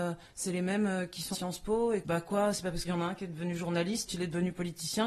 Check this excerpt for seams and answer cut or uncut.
cut